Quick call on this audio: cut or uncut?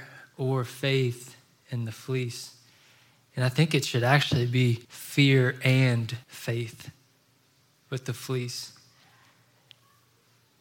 cut